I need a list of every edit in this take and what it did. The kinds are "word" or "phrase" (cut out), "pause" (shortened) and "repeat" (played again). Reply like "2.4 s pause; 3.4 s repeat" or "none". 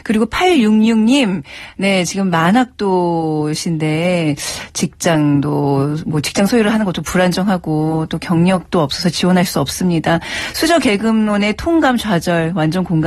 none